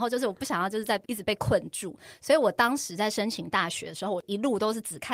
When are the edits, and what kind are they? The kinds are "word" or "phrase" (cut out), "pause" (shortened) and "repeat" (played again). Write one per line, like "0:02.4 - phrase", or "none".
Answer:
0:01.0 - pause